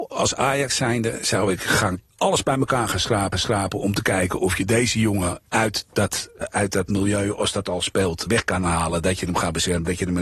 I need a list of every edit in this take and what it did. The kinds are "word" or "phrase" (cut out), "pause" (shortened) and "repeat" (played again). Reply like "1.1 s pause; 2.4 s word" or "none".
2.1 s pause; 3.3 s repeat; 6.4 s word; 8.3 s word